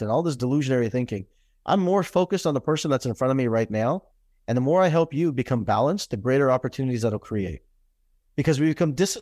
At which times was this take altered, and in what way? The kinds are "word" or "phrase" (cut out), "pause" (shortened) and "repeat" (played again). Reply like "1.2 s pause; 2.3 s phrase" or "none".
none